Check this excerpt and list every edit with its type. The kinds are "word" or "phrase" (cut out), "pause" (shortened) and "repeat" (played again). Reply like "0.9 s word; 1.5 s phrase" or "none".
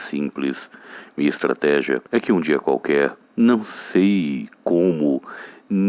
2.1 s pause; 3.2 s pause; 4.5 s pause